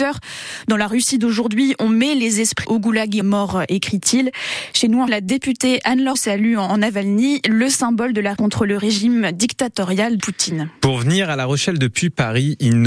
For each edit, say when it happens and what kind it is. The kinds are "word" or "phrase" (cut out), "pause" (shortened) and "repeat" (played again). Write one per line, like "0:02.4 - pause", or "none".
0:02.6 - word
0:03.2 - phrase
0:05.1 - word
0:06.1 - word
0:08.4 - word
0:10.2 - word